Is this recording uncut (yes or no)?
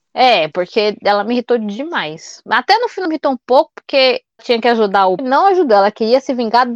no